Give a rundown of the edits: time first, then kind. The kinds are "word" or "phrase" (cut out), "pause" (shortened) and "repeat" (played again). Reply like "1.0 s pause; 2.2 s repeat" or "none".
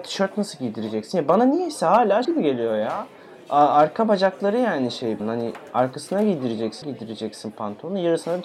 2.2 s word; 5.2 s phrase; 6.8 s word